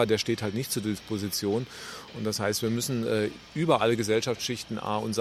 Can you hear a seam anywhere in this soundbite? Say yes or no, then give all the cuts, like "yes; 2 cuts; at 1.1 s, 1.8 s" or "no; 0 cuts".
no; 0 cuts